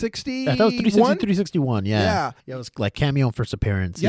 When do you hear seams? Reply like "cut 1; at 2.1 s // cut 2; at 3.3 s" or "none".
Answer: cut 1; at 2.4 s